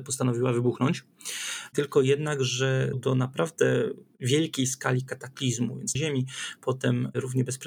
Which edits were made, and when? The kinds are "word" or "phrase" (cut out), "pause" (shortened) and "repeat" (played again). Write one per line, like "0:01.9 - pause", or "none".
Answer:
0:02.9 - word
0:05.9 - phrase